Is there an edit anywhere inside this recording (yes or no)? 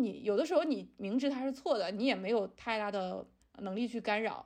yes